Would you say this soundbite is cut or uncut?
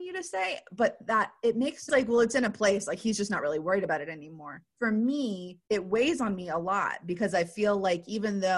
cut